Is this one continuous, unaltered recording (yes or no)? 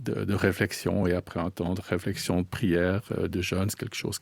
yes